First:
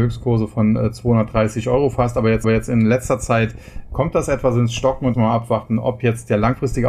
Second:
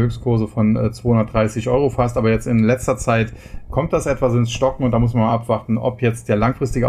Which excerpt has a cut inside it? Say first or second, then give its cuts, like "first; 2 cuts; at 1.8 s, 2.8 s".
first; 2 cuts; at 2.4 s, 5.1 s